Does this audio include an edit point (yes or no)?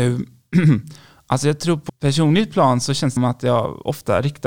yes